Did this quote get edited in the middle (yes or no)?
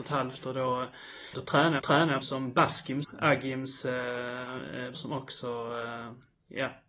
yes